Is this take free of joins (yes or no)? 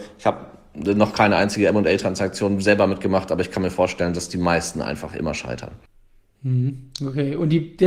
yes